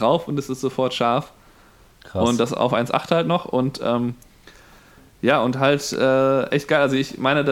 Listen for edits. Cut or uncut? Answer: uncut